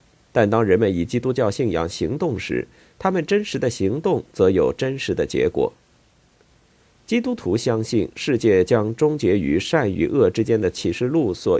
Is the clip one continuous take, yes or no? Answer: yes